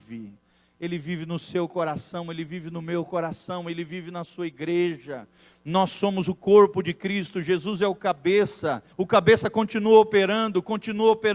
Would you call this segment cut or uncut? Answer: cut